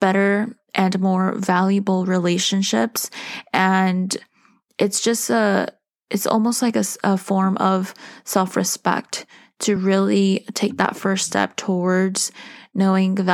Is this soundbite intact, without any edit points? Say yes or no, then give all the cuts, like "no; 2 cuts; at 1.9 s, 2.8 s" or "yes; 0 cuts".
yes; 0 cuts